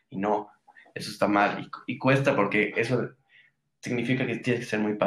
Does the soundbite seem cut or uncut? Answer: uncut